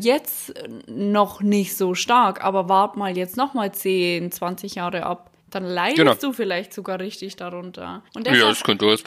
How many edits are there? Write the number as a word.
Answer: two